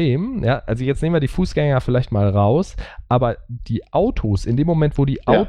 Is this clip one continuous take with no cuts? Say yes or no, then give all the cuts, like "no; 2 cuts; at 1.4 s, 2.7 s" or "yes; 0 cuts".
yes; 0 cuts